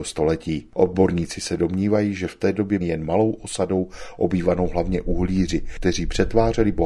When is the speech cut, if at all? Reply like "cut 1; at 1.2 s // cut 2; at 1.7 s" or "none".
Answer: cut 1; at 2.8 s